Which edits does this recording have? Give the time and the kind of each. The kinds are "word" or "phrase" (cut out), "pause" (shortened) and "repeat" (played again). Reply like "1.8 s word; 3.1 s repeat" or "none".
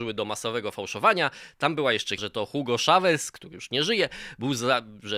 2.2 s word